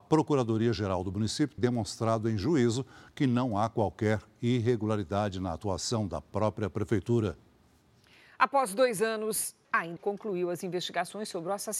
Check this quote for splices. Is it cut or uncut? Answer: cut